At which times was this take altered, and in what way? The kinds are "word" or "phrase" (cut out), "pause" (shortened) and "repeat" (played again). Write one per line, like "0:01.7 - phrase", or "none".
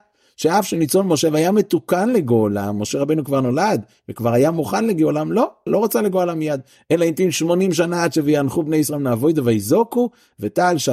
0:05.7 - word

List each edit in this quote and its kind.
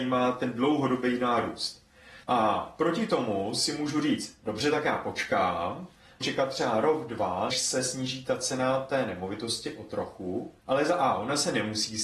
0:02.2 - pause
0:06.2 - word
0:07.5 - word
0:10.6 - pause

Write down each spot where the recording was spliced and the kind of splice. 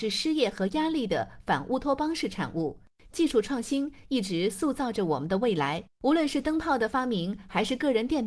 0:05.9 - pause

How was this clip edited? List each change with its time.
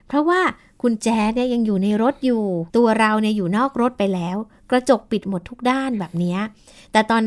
0:02.7 - pause

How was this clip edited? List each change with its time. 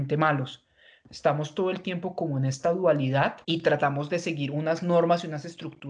0:03.4 - pause

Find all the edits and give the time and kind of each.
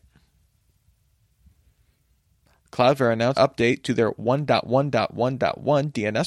0:03.3 - word

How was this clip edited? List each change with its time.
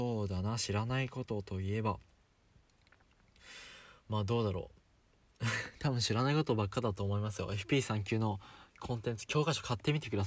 0:08.7 - pause

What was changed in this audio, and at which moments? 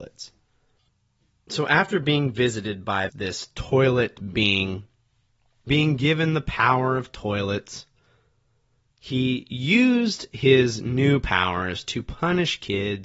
0:03.1 - word
0:05.7 - word

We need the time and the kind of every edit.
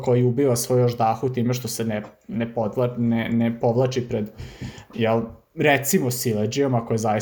none

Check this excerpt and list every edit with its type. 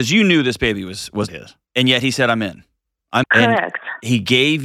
0:01.3 - word
0:01.6 - pause
0:03.2 - word

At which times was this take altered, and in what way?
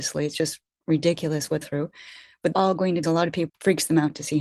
0:01.6 - phrase
0:02.5 - phrase
0:03.0 - phrase
0:03.5 - word

